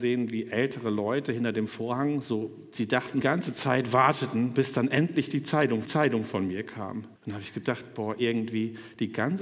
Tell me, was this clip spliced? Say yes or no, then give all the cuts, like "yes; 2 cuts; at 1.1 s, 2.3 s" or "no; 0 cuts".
yes; 3 cuts; at 3.2 s, 5.8 s, 7.2 s